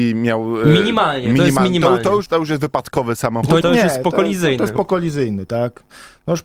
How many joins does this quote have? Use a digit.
2